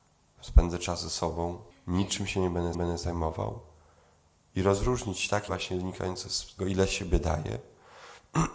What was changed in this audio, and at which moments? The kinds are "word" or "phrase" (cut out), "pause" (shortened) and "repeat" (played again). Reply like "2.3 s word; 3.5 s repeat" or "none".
1.7 s pause; 2.7 s repeat; 5.5 s word; 6.6 s word